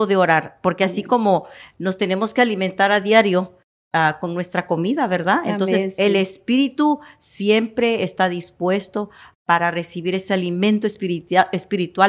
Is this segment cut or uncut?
uncut